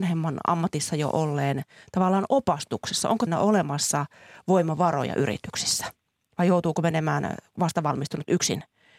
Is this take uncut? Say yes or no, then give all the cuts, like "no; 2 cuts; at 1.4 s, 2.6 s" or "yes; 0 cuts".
no; 1 cut; at 3.3 s